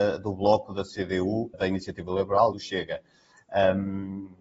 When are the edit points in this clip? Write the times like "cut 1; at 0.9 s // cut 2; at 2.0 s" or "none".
cut 1; at 1.5 s // cut 2; at 2.5 s